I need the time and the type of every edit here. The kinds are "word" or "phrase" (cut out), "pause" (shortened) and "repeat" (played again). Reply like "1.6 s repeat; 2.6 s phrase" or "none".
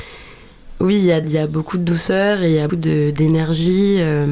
1.2 s word; 2.7 s word